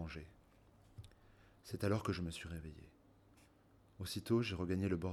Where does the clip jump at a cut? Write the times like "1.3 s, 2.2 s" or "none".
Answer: none